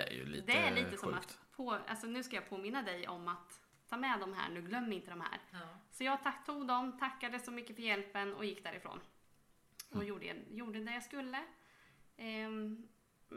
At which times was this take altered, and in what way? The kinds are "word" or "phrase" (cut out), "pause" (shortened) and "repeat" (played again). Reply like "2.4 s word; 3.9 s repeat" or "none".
3.7 s pause